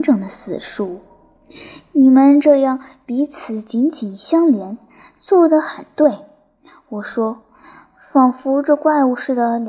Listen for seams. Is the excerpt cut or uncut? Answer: uncut